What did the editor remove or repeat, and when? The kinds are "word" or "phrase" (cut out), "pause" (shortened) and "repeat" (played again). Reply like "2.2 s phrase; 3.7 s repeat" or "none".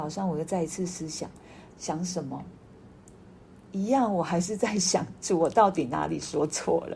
1.7 s word